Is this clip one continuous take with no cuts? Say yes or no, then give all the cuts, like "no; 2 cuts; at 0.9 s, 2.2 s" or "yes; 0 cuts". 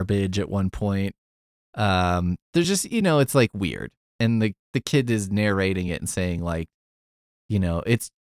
yes; 0 cuts